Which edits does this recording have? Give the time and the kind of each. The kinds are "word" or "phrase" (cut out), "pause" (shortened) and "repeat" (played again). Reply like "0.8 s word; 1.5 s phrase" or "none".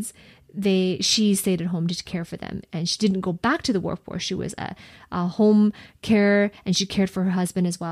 none